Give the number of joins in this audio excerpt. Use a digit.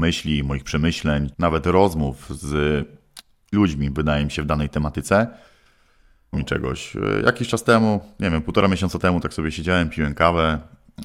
3